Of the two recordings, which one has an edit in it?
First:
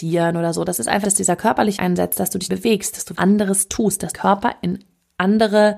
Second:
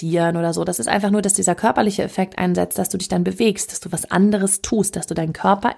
first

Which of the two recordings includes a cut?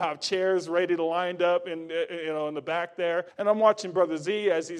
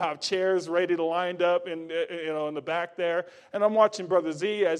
first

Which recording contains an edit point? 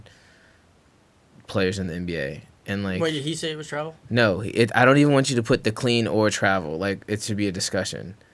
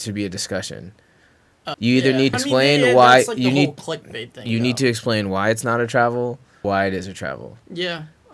second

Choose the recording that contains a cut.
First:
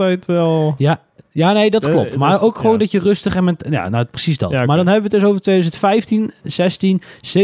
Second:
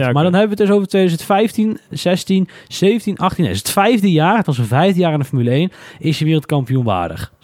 second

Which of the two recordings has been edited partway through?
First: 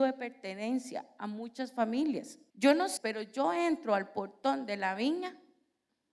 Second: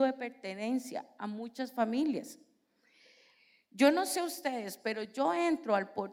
first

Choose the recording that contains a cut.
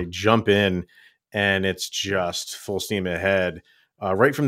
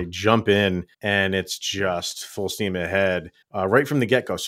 second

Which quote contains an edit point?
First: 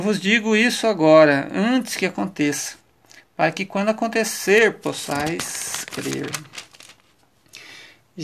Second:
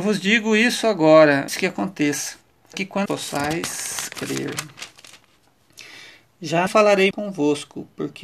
second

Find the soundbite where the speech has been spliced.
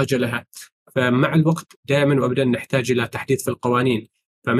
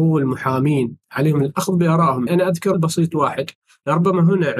second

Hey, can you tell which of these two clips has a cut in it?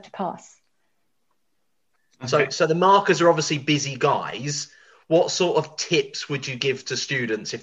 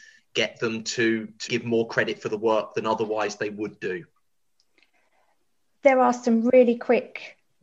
second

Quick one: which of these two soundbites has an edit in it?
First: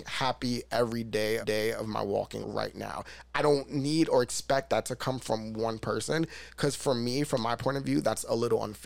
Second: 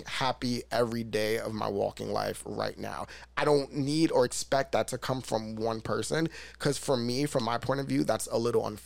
first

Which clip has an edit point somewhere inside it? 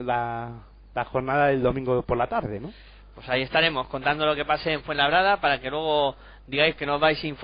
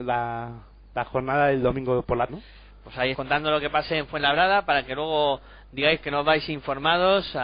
second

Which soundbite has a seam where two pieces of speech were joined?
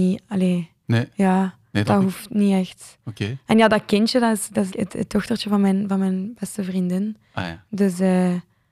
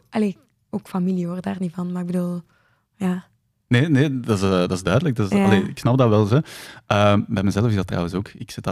first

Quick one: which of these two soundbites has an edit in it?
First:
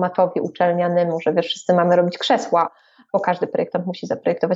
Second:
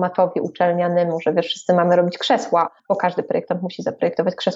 second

